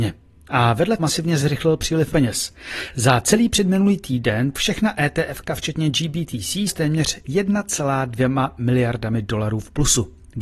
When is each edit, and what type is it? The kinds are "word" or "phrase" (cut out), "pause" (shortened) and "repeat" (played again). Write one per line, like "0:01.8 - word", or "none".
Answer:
0:01.0 - word
0:02.1 - word
0:04.5 - word
0:06.7 - word